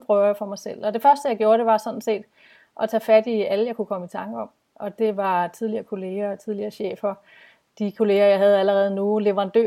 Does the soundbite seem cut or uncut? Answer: uncut